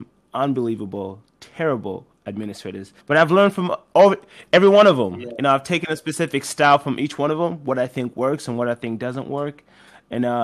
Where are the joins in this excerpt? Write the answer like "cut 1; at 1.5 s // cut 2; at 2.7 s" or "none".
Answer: cut 1; at 3.0 s